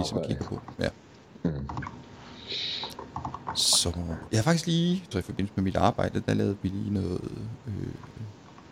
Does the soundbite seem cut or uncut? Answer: cut